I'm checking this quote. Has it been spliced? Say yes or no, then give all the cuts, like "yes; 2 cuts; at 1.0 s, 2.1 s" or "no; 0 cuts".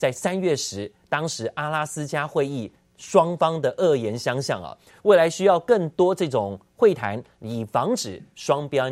no; 0 cuts